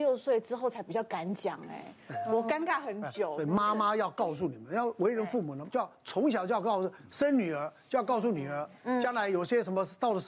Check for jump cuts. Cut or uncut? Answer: cut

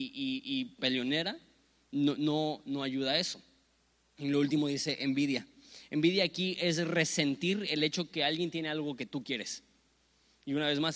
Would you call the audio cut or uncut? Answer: uncut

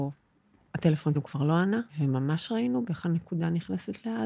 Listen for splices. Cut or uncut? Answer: cut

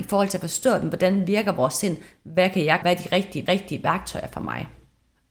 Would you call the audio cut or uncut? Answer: cut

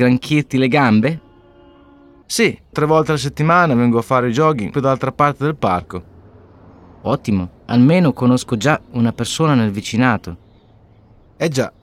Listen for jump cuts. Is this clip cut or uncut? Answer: cut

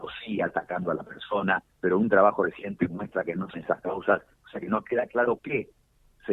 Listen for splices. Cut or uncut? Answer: cut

